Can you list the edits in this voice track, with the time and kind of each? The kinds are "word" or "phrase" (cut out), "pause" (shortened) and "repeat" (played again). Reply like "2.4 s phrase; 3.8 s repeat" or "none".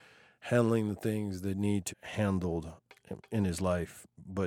1.9 s word